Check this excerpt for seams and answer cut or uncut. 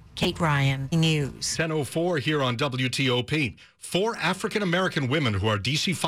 cut